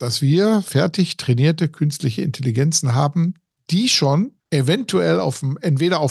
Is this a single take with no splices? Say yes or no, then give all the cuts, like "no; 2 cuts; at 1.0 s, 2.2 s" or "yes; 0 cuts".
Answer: no; 2 cuts; at 3.5 s, 4.4 s